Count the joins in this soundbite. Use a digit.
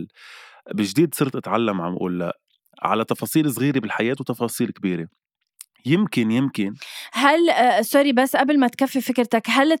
0